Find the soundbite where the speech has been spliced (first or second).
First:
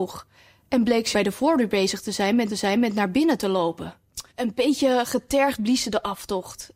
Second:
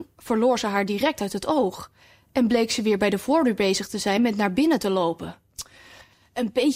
first